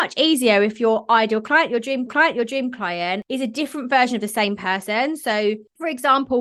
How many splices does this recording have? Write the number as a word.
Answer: one